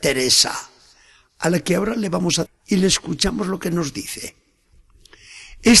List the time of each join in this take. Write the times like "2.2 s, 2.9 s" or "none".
2.5 s